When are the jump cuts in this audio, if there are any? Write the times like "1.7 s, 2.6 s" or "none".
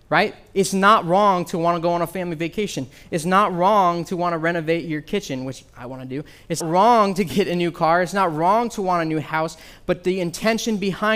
6.6 s